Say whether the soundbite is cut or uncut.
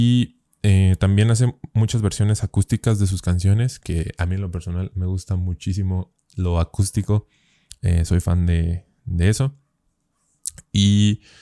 uncut